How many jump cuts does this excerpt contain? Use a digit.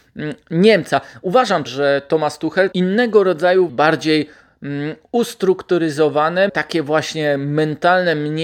4